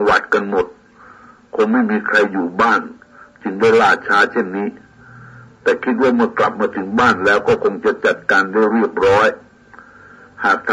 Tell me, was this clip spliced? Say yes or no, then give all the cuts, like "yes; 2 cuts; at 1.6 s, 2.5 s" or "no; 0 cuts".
no; 0 cuts